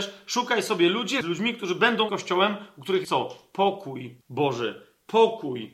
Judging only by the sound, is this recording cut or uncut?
cut